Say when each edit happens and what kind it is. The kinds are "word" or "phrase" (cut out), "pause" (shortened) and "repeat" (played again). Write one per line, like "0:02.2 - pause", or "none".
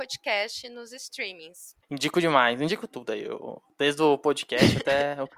0:01.8 - pause